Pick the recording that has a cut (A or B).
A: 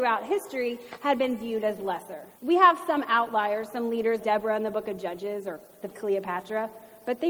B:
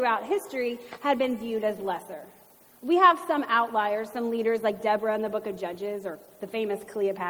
A